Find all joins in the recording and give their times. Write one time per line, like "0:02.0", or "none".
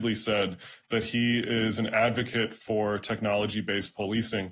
none

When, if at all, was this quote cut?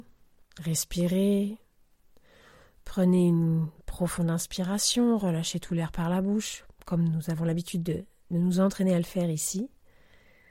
none

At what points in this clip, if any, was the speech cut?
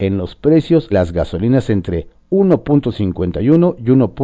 0:00.9

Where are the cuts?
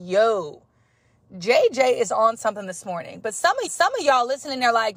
0:03.7

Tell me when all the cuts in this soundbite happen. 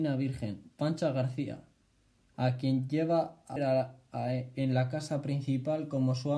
0:03.6

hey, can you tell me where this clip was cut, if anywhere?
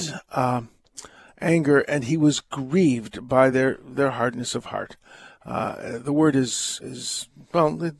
none

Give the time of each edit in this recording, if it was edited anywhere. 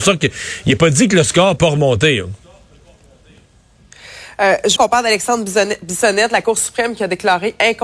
0:01.6
0:04.8

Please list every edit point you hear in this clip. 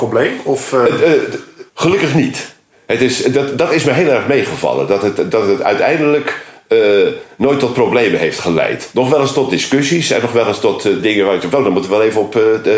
0:01.7
0:11.0

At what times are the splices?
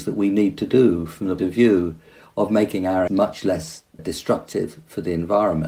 0:01.4
0:03.1
0:04.0

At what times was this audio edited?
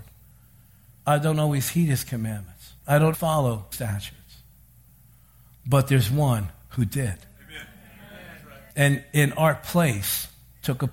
0:02.8
0:03.1
0:03.7
0:08.7

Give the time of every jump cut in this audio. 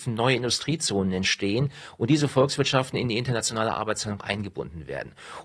none

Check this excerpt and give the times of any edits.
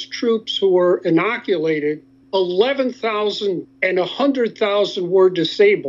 0:02.2
0:03.6

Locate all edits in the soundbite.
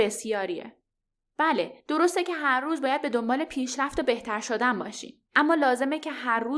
none

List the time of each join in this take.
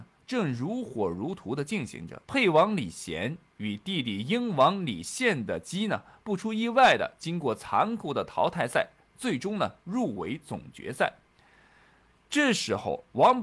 0:02.2

